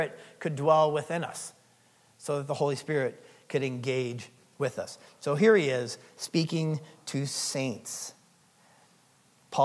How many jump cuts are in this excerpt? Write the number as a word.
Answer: zero